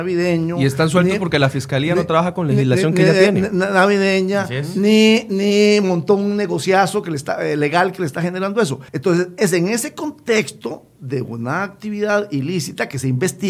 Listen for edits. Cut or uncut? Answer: cut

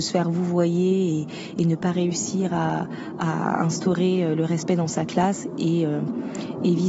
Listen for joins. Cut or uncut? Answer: uncut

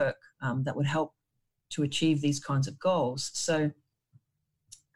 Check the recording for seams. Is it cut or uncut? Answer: uncut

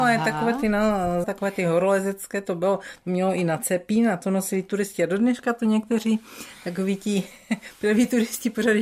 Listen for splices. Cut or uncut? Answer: cut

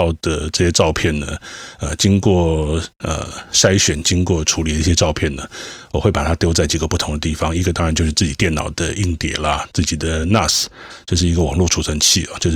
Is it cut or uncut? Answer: uncut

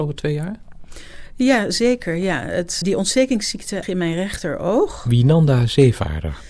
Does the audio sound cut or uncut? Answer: cut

